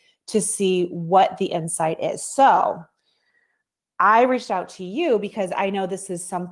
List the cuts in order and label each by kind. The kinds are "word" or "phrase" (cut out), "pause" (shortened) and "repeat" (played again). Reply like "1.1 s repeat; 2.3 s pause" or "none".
none

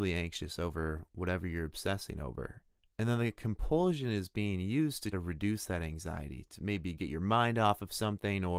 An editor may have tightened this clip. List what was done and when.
2.8 s pause; 5.1 s word

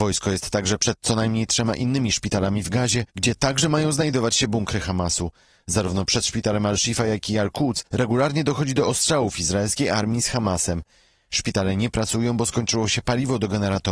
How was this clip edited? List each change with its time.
3.1 s pause; 7.9 s pause

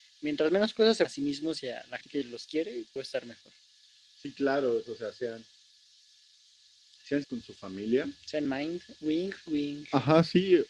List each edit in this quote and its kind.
1.0 s word; 2.0 s word; 3.0 s word; 4.9 s word; 7.2 s word; 8.4 s word

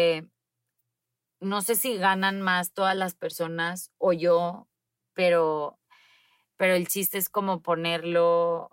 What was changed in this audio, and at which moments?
none

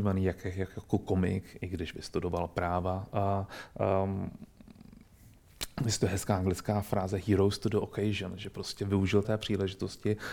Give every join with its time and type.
9.2 s word

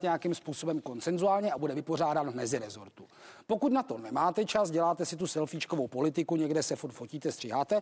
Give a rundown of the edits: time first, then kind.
none

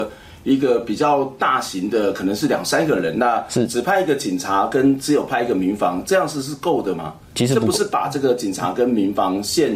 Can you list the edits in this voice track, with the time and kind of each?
7.2 s pause

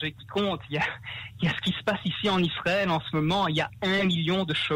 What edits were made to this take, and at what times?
none

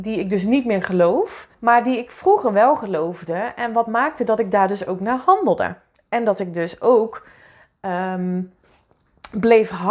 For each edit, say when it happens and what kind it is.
1.5 s pause

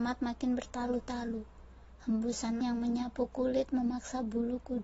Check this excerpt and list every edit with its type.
2.6 s word

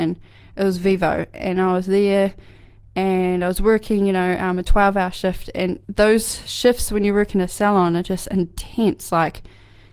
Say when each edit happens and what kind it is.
5.8 s pause

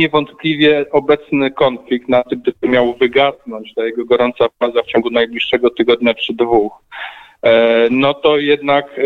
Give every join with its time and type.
none

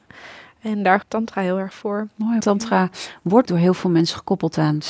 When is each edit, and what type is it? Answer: 1.0 s word; 1.7 s word; 2.4 s word; 3.4 s word

